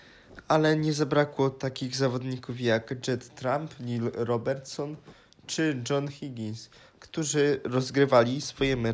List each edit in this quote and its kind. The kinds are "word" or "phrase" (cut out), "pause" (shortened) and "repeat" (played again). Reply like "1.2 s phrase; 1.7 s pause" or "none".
none